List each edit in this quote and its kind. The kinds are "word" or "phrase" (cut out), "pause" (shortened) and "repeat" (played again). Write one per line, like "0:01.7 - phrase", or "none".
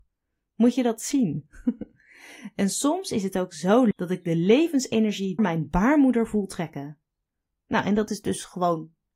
0:03.9 - word
0:05.4 - word